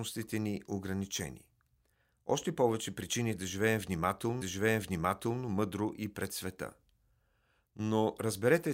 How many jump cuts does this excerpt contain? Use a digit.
1